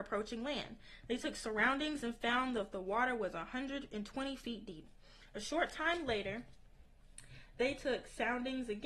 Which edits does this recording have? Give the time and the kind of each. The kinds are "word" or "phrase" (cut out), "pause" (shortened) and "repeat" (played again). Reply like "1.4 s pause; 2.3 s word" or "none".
none